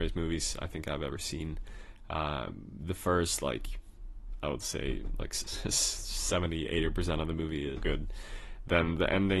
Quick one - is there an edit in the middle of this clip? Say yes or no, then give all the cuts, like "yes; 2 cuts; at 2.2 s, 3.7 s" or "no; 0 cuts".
yes; 1 cut; at 7.8 s